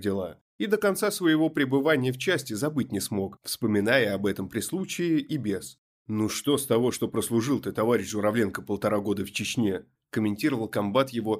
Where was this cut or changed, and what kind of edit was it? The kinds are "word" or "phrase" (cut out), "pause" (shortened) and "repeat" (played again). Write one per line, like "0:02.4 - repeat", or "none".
none